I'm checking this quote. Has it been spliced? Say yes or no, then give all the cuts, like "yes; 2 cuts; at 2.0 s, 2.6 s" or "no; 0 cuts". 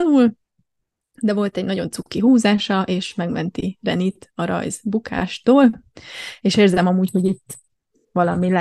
no; 0 cuts